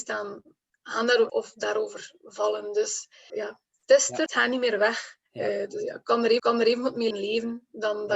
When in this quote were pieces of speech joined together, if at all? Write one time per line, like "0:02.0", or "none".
0:01.3
0:03.3
0:04.3
0:05.3
0:06.4
0:07.1